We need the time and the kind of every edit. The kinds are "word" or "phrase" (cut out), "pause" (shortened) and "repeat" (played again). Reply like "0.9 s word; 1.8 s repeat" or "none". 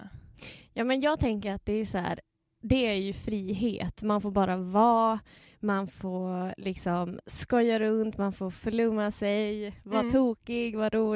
none